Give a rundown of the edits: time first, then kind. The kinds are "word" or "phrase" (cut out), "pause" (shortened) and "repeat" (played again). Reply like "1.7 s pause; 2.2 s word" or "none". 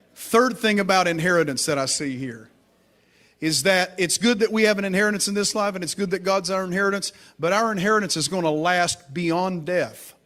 none